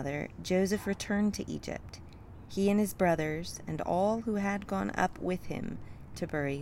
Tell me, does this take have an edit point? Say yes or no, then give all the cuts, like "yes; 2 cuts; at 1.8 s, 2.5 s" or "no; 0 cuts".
no; 0 cuts